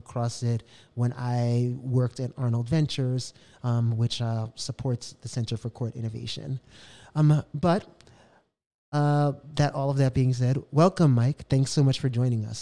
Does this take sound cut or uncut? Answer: uncut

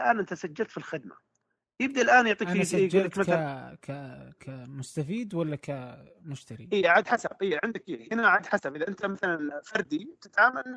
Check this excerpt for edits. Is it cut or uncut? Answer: uncut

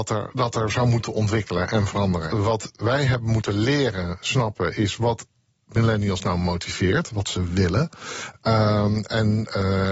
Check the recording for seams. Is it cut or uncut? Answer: uncut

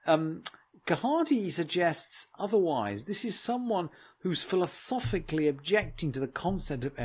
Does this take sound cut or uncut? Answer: uncut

